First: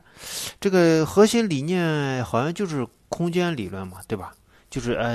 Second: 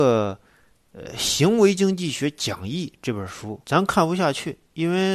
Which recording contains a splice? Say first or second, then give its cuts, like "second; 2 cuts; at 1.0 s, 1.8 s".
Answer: second; 1 cut; at 3.6 s